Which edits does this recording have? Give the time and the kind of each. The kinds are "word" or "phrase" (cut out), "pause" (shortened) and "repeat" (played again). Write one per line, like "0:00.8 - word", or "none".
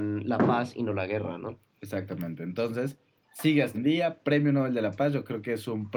0:03.7 - word